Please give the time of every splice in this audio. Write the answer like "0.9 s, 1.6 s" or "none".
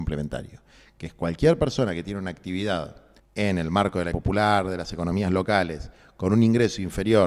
3.2 s, 4.1 s